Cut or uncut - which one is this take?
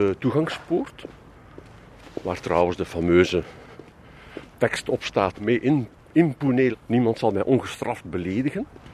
cut